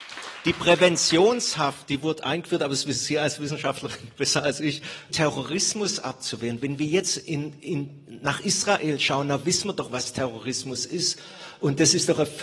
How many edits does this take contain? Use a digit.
1